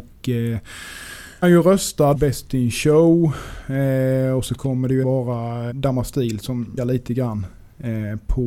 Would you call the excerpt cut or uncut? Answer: cut